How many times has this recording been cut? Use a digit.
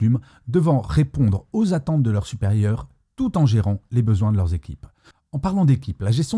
0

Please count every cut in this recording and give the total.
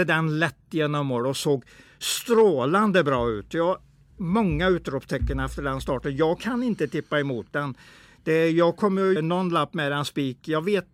1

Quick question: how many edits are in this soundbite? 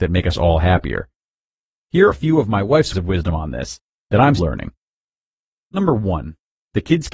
3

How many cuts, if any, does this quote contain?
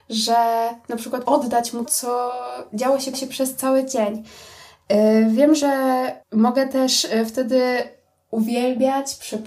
4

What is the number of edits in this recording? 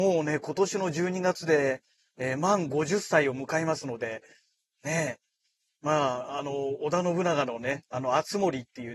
0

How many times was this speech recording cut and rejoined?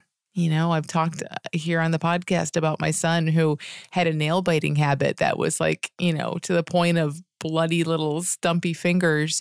0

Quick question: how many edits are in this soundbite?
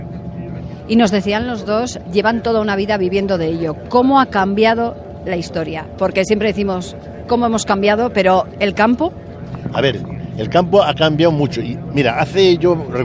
0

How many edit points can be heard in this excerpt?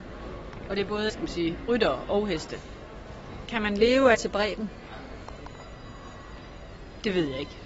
2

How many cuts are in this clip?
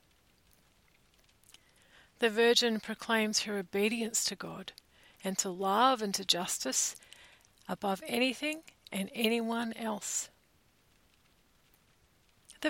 0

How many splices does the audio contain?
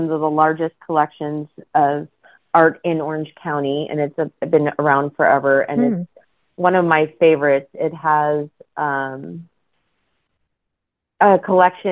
0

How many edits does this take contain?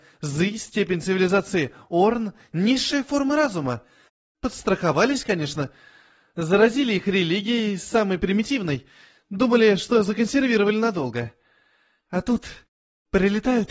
0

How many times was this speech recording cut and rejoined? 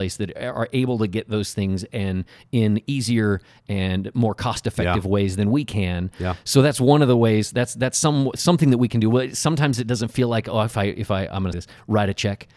1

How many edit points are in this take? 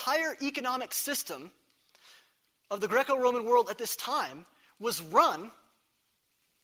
0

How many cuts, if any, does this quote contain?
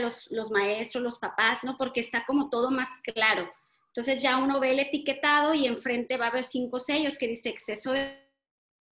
0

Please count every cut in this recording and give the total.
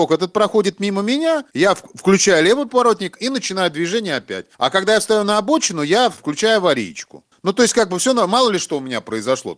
1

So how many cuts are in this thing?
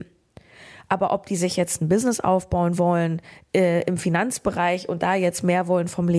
0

